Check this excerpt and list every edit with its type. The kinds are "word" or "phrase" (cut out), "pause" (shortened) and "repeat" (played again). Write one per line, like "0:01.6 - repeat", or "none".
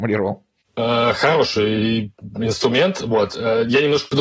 none